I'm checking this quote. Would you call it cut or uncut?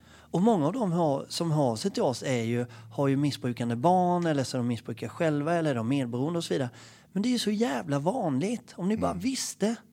uncut